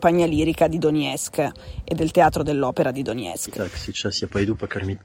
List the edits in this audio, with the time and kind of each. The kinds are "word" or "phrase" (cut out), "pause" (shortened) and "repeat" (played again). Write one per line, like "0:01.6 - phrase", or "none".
none